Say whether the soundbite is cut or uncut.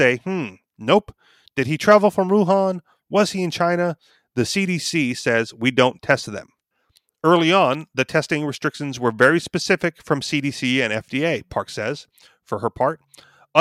uncut